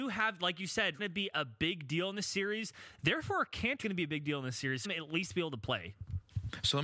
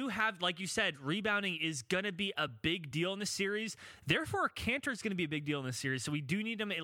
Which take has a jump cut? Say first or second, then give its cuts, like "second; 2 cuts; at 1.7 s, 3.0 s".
first; 3 cuts; at 1.0 s, 3.8 s, 4.8 s